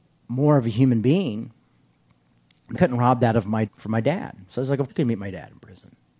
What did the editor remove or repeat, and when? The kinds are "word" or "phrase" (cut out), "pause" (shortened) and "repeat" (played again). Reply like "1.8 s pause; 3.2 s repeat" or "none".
2.7 s word; 3.7 s word; 4.9 s word